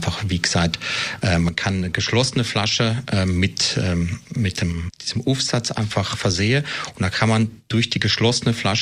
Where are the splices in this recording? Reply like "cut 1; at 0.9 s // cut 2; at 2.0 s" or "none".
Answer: cut 1; at 4.2 s